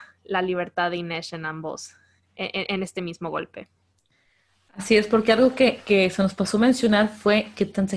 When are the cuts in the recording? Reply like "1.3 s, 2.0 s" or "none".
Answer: none